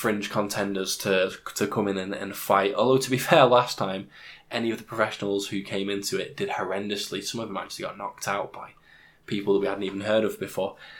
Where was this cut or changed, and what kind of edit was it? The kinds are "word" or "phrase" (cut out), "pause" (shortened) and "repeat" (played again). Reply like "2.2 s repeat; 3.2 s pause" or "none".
none